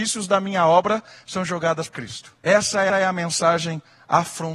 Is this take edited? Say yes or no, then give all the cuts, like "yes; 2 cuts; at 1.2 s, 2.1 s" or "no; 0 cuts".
yes; 3 cuts; at 1.9 s, 2.4 s, 2.9 s